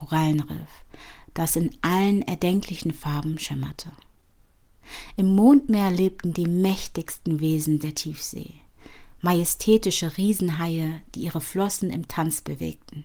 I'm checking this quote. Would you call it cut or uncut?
uncut